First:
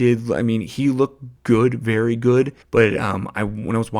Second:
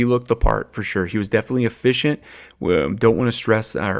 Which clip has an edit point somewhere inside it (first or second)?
first